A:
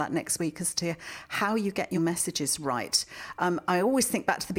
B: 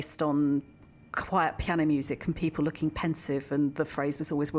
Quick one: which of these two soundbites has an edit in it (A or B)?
A